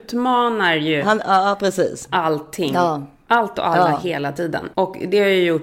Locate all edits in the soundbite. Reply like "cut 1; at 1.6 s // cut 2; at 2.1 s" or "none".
cut 1; at 4.7 s